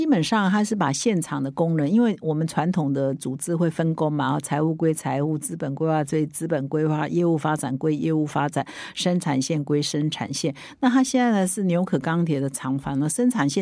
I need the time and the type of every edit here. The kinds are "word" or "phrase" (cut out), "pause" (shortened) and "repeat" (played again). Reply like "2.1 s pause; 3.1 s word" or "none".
none